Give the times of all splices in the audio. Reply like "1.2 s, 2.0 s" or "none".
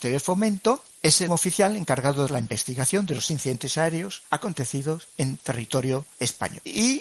1.3 s, 2.3 s, 3.3 s, 4.3 s